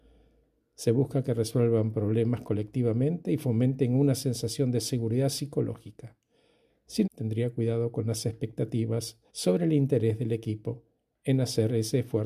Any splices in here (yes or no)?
yes